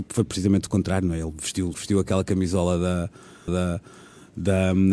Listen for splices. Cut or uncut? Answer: cut